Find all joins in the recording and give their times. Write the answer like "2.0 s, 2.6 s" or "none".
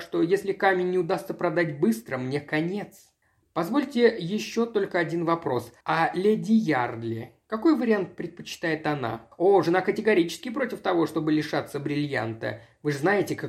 3.2 s, 5.8 s, 9.3 s